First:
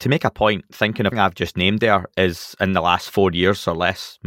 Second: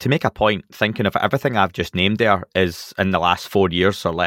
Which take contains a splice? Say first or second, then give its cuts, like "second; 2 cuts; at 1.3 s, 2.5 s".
first; 1 cut; at 1.1 s